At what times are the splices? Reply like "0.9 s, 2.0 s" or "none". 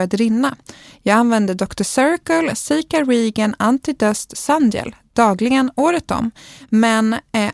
none